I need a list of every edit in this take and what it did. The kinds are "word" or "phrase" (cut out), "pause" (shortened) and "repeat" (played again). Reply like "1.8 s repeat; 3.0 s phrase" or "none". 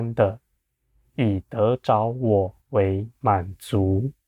2.6 s pause

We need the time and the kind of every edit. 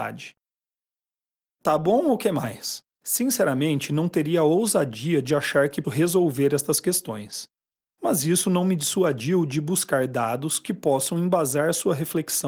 2.9 s pause; 5.8 s word

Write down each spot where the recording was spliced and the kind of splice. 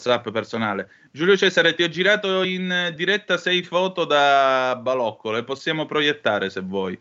none

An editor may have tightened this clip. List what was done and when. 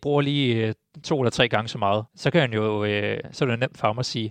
2.1 s pause

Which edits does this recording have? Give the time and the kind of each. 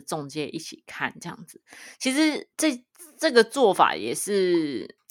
2.5 s pause

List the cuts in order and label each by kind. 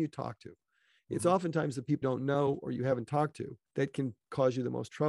2.0 s word; 3.7 s pause

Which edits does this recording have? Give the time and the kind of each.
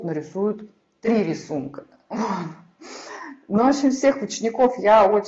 none

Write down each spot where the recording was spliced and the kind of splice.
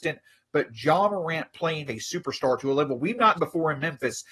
1.9 s word; 3.3 s word

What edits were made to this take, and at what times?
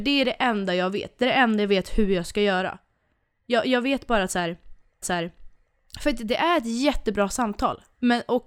5.0 s repeat

